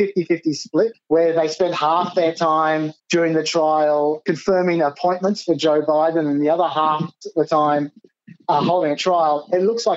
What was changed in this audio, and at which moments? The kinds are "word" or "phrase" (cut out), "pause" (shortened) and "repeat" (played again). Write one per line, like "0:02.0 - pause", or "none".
0:03.0 - pause